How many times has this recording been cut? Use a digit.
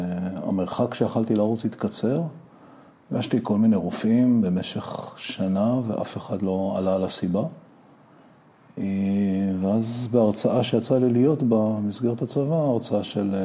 0